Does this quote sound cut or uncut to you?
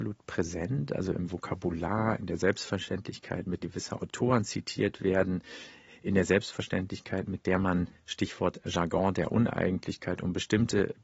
cut